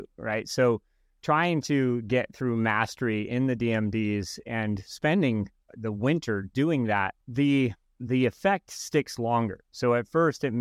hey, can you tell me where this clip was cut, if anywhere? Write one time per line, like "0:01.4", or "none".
0:07.2